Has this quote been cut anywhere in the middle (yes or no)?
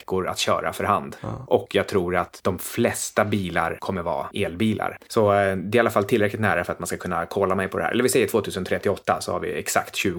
no